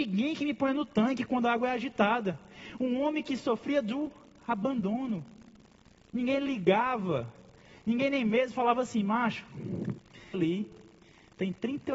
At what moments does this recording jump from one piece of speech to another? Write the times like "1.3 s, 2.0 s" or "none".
10.3 s